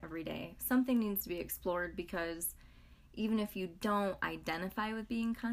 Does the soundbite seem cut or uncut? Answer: uncut